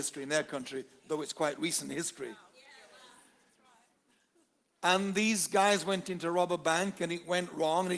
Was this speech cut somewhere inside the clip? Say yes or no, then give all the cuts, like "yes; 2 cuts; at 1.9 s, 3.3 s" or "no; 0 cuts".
no; 0 cuts